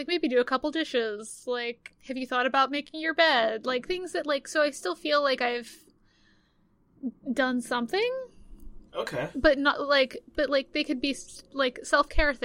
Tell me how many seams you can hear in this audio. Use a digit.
3